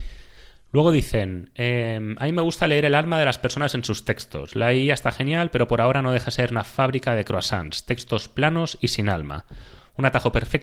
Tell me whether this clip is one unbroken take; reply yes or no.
yes